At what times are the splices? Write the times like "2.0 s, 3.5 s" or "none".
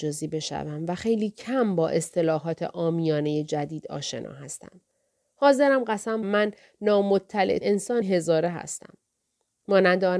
6.2 s, 7.6 s, 8.0 s